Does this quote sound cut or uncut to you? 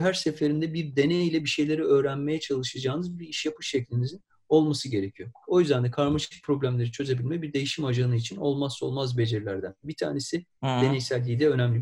uncut